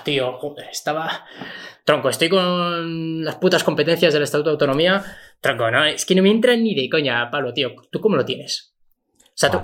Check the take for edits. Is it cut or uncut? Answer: uncut